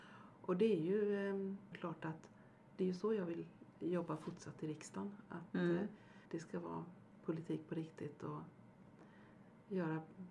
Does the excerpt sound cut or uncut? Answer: cut